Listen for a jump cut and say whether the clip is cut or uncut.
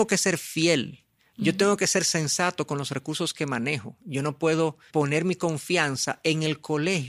cut